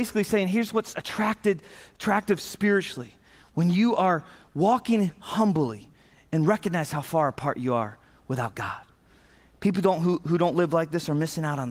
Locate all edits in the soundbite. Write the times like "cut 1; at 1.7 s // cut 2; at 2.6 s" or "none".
none